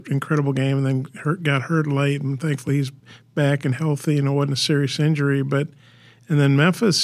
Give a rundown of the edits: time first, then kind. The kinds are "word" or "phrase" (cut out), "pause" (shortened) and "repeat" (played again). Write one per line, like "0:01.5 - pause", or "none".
none